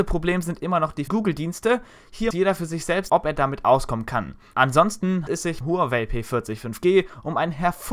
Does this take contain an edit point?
yes; 5 cuts; at 1.1 s, 2.3 s, 3.1 s, 5.3 s, 5.6 s

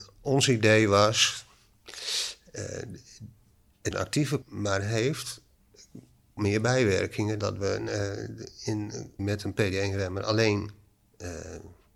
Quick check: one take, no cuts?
no; 5 cuts; at 3.9 s, 4.4 s, 6.4 s, 7.4 s, 9.2 s

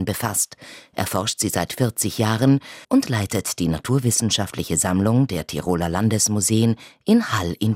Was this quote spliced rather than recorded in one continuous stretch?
yes; 1 cut; at 2.8 s

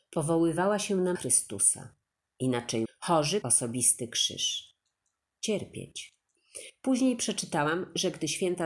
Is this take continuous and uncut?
no; 3 cuts; at 1.1 s, 2.8 s, 3.4 s

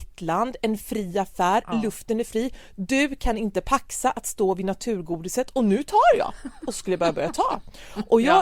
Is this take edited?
no; 0 cuts

